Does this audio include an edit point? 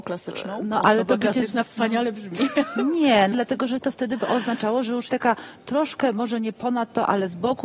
yes; 2 cuts; at 3.3 s, 5.1 s

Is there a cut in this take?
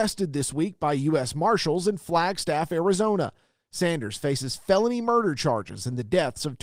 no; 0 cuts

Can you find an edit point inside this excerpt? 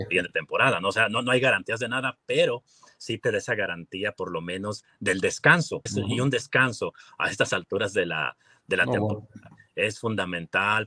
yes; 1 cut; at 5.9 s

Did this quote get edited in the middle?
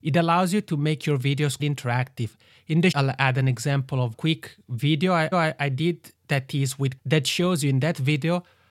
yes; 6 cuts; at 1.6 s, 2.9 s, 4.1 s, 5.3 s, 6.2 s, 7.0 s

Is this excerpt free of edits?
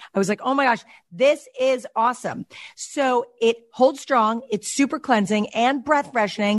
yes; 0 cuts

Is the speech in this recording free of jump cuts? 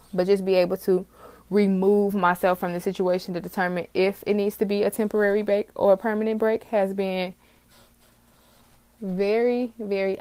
yes; 0 cuts

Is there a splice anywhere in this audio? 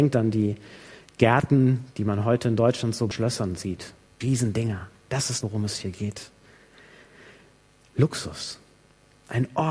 yes; 3 cuts; at 3.1 s, 4.2 s, 5.4 s

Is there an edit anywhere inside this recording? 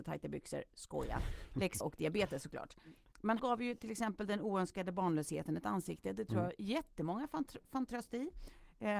yes; 2 cuts; at 1.8 s, 3.4 s

